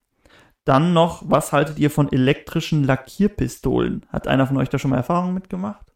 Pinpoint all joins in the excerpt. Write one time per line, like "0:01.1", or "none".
none

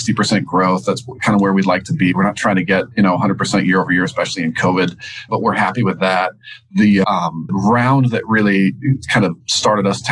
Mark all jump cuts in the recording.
0:05.3
0:07.0
0:07.5

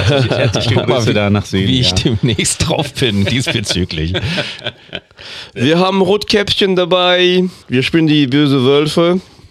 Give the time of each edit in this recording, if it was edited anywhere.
0:07.6

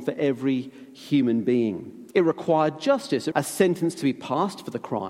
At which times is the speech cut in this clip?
0:02.1
0:03.3

